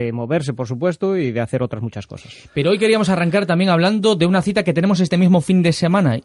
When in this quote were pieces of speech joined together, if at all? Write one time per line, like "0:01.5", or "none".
none